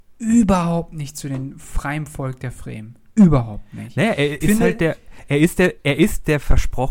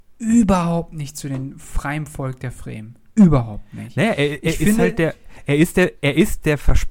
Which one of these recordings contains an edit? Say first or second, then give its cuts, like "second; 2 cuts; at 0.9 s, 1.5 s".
first; 1 cut; at 4.4 s